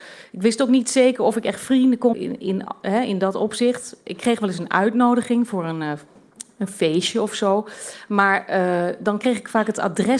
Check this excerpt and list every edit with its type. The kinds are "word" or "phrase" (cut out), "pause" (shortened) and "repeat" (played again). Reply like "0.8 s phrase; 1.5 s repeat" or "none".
2.1 s word